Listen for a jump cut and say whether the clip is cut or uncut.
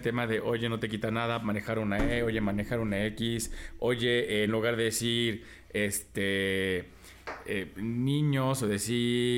uncut